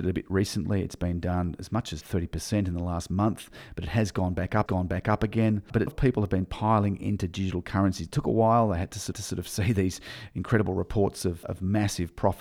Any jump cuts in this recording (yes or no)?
yes